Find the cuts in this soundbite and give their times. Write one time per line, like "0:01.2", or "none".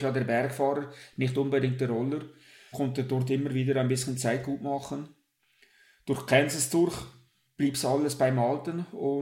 0:02.7